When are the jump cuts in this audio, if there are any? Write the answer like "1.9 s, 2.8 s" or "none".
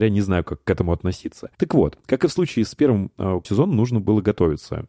1.5 s, 3.1 s, 3.4 s